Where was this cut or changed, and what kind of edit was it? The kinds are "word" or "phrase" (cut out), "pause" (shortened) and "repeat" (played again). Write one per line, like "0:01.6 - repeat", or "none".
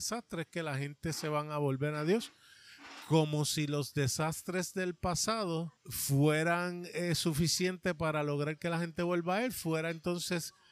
0:05.8 - pause